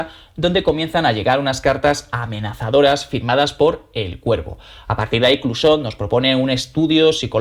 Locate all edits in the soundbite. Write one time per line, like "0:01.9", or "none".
none